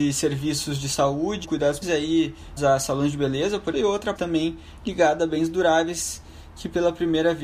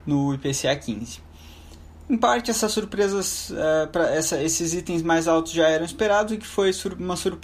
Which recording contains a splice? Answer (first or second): first